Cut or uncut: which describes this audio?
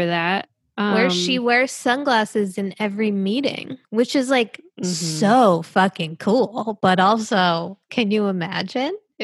cut